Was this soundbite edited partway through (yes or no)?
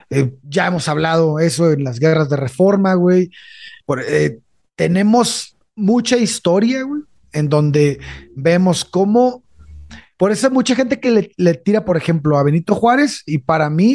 no